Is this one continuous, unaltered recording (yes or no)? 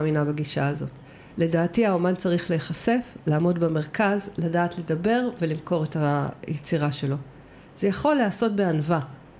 yes